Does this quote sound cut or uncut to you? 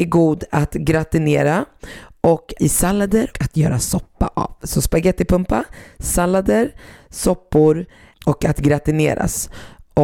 cut